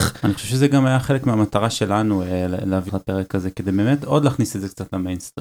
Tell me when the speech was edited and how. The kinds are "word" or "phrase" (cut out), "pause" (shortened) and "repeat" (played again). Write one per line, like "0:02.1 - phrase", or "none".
0:02.9 - word